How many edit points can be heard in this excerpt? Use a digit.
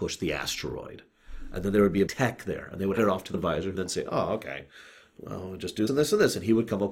5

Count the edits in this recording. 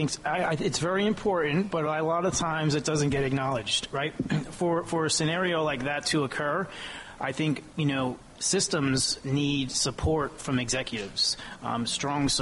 0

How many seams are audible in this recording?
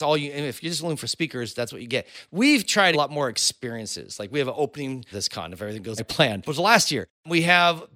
4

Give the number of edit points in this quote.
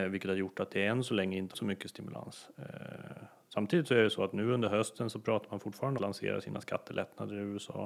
2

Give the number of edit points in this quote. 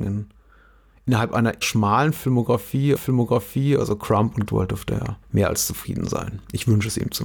4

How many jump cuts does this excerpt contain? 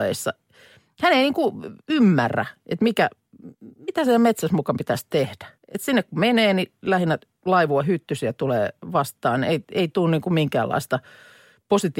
1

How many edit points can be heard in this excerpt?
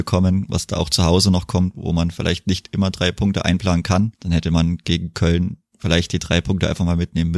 1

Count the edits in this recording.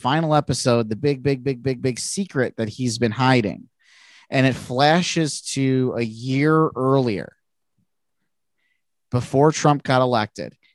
2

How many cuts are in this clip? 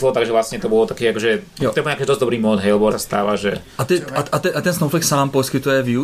1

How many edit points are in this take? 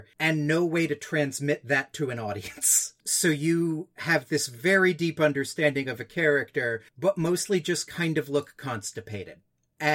2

